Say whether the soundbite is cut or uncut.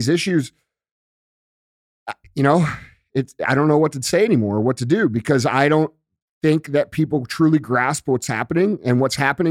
uncut